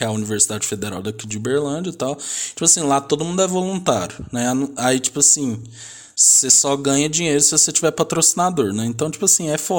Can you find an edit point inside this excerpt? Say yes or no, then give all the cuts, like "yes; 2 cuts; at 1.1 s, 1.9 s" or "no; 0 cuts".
no; 0 cuts